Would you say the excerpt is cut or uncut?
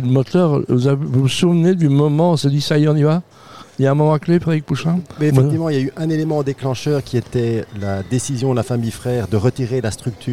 uncut